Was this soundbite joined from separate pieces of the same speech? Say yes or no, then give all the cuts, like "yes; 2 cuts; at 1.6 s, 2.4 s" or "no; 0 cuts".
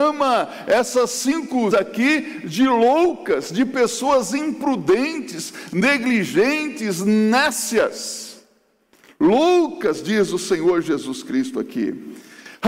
yes; 1 cut; at 1.7 s